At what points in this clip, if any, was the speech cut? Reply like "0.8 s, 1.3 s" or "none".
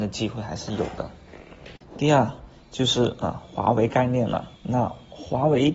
1.8 s, 4.6 s